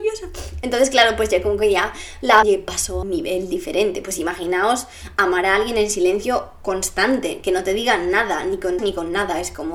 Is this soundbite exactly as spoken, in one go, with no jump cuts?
no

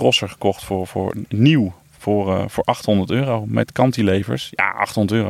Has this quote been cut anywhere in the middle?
yes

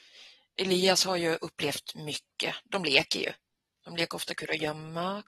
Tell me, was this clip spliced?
no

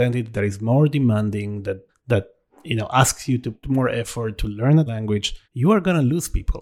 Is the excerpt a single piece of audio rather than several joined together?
no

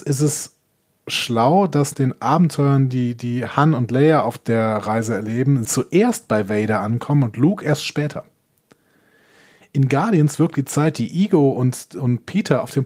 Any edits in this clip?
yes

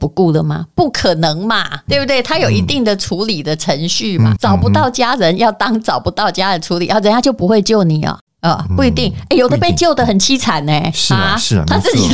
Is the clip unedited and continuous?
no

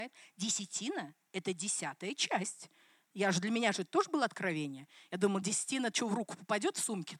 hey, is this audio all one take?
yes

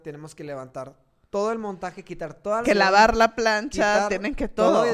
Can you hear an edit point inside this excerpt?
yes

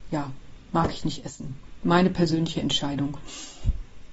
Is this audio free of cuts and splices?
yes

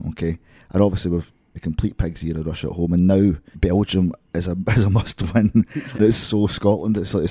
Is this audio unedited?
no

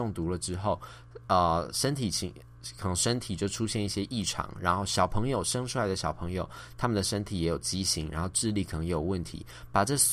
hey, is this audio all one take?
yes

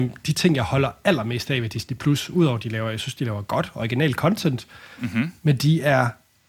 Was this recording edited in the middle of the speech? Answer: no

